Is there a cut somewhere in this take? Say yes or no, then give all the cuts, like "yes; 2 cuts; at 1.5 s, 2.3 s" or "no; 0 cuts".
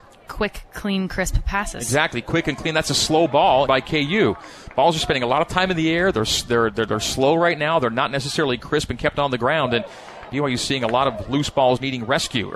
yes; 1 cut; at 3.7 s